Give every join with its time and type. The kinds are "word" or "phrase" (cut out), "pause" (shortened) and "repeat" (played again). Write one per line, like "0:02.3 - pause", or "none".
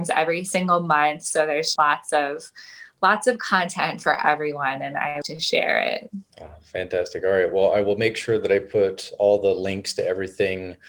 0:01.8 - word
0:05.2 - word
0:06.3 - pause